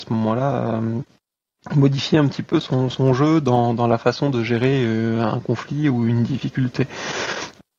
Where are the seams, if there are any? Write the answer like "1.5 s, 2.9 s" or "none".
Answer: none